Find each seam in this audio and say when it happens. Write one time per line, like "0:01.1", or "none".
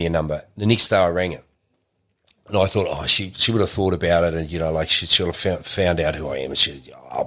none